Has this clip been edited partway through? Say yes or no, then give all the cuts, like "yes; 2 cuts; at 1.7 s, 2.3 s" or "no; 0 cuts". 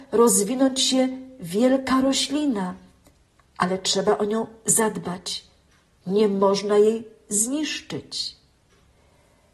no; 0 cuts